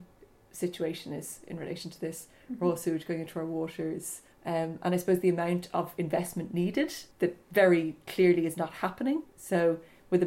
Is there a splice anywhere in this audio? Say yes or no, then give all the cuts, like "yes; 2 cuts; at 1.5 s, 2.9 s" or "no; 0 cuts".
yes; 3 cuts; at 4.3 s, 7.1 s, 9.3 s